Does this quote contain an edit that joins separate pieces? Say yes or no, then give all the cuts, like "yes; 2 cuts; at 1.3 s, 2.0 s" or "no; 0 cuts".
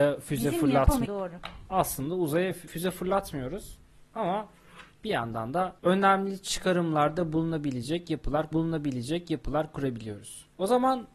yes; 5 cuts; at 1.1 s, 2.7 s, 4.9 s, 5.8 s, 8.5 s